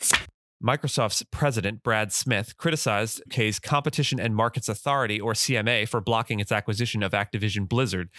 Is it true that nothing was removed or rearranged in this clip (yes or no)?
no